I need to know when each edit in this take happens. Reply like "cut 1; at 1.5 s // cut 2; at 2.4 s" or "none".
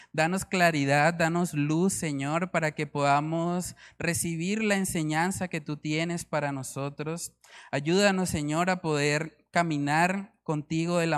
none